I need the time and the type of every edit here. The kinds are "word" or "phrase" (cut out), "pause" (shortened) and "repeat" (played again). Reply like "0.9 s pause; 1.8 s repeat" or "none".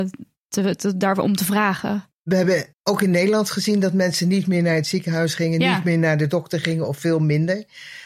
2.7 s pause